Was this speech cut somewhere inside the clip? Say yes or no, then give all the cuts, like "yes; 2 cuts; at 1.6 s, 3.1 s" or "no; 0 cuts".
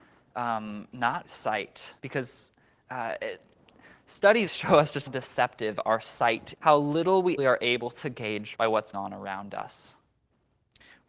yes; 8 cuts; at 1.2 s, 2.0 s, 4.5 s, 5.1 s, 6.6 s, 7.4 s, 8.5 s, 8.9 s